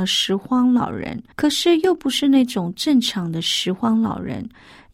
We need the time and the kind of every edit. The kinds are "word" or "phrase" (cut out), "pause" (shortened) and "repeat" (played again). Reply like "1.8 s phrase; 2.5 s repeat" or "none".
1.3 s pause